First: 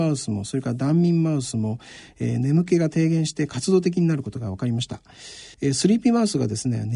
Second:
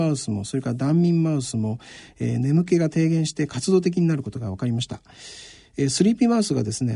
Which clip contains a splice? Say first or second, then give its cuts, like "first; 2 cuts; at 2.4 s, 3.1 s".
first; 1 cut; at 5.5 s